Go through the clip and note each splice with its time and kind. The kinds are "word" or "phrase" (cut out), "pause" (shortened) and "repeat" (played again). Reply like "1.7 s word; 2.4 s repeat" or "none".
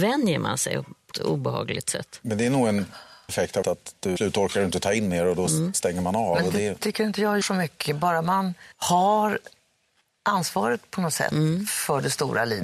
1.1 s word; 3.3 s word; 3.6 s word; 4.2 s phrase; 7.4 s word; 8.7 s pause